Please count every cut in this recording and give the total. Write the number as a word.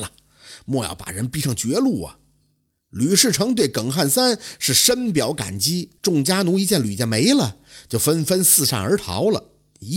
one